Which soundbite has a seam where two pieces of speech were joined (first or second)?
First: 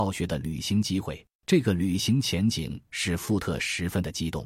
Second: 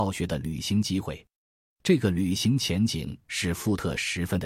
first